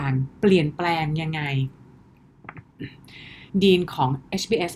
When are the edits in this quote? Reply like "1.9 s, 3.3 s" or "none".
3.5 s